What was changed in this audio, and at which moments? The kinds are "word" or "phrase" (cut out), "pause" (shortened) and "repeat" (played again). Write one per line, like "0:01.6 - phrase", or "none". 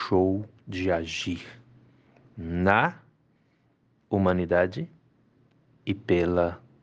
none